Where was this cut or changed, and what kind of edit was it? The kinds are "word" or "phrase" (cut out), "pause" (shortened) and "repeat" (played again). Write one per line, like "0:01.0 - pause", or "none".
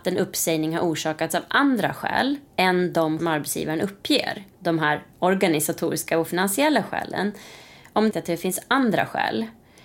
0:03.2 - phrase
0:04.5 - pause
0:08.1 - phrase